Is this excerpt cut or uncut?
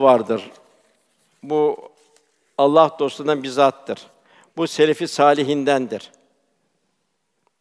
uncut